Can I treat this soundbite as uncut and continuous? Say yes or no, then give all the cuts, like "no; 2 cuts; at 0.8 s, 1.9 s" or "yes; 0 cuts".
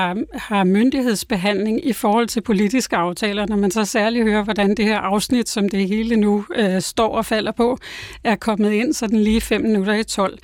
yes; 0 cuts